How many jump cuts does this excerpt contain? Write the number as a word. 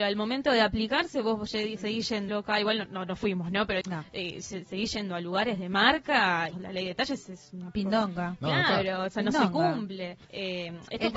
four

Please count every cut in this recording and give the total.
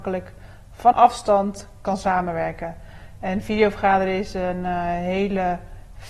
one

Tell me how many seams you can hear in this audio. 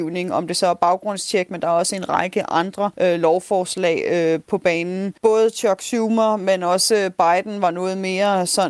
two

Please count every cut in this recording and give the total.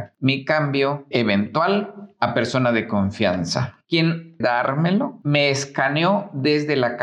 two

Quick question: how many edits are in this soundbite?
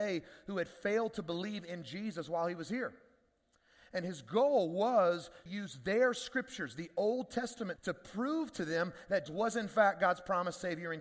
three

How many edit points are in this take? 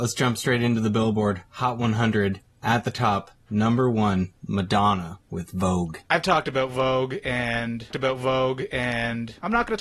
one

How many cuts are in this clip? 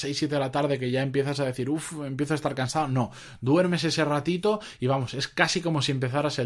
zero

